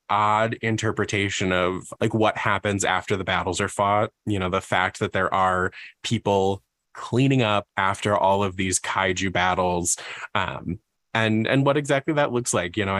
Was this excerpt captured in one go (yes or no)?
no